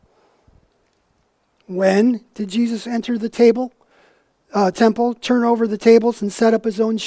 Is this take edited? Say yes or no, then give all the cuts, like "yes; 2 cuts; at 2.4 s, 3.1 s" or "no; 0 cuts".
no; 0 cuts